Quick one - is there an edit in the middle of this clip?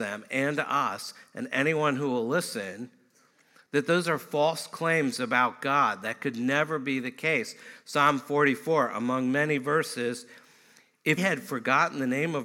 yes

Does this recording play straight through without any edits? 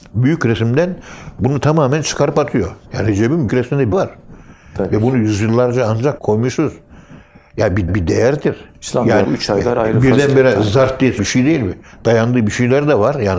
no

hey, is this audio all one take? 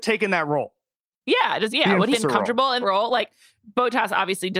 no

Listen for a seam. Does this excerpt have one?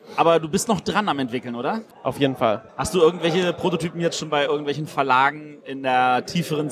yes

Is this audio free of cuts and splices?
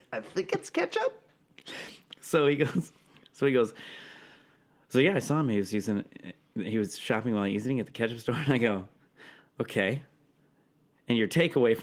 yes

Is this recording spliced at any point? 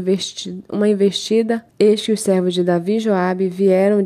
yes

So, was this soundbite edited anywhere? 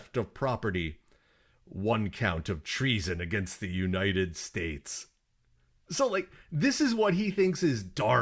no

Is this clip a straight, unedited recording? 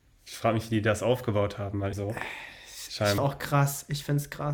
no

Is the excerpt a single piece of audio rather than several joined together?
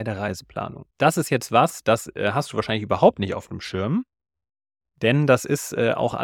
no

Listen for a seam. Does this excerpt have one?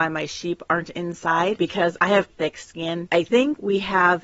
yes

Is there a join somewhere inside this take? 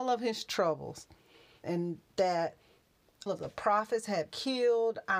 yes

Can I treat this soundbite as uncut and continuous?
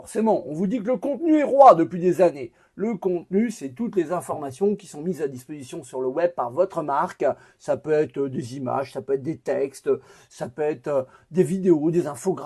yes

